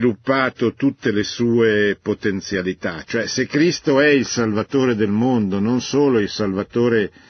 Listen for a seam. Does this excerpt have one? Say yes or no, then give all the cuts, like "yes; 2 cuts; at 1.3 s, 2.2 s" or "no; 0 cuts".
no; 0 cuts